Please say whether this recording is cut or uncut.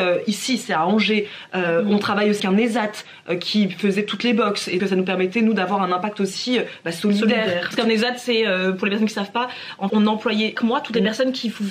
cut